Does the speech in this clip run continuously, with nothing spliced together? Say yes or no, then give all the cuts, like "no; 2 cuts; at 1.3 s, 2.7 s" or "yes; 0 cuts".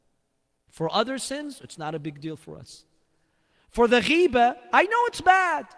yes; 0 cuts